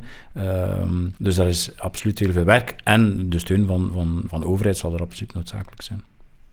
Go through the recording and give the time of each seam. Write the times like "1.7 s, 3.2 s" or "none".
1.2 s, 4.3 s